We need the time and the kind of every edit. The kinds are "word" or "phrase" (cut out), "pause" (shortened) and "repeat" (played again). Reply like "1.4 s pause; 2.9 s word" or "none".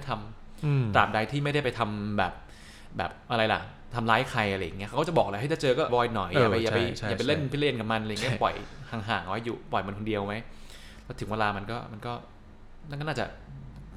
5.9 s word

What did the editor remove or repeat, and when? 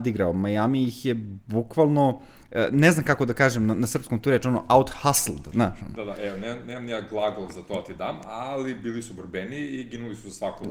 none

